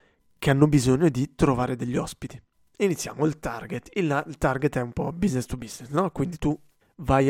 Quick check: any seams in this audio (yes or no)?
no